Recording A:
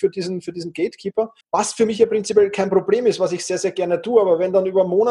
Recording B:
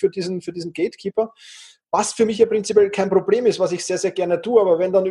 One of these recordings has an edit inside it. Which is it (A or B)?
A